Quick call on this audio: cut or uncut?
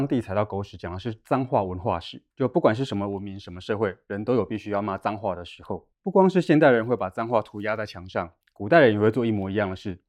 cut